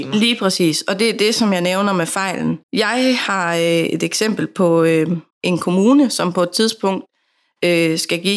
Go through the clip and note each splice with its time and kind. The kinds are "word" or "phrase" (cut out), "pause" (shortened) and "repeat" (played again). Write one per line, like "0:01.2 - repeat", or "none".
0:02.6 - pause
0:05.3 - pause